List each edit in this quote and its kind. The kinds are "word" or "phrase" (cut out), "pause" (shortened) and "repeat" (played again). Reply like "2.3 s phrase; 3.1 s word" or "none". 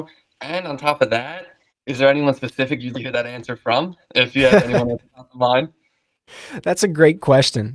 1.7 s pause; 2.9 s word; 4.0 s pause